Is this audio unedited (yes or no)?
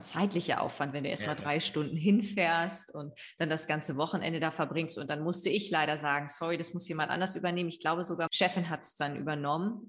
no